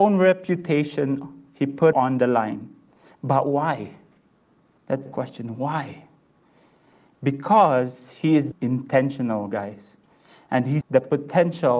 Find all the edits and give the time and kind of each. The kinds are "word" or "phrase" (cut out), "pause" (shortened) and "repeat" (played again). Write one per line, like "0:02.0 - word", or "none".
0:01.9 - word
0:05.1 - word
0:08.5 - word
0:10.8 - word